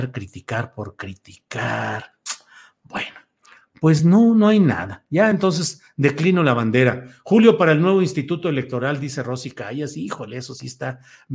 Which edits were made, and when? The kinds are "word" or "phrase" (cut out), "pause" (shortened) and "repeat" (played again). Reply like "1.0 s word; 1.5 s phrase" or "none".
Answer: none